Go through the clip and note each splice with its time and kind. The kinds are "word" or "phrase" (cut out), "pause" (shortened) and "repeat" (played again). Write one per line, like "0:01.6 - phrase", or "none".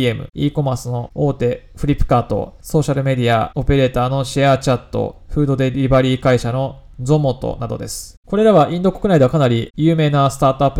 0:02.6 - pause